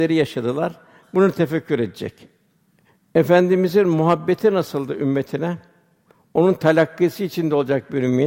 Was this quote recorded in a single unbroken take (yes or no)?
yes